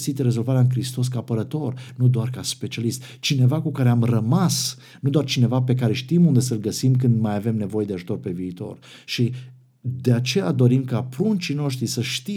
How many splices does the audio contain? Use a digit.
0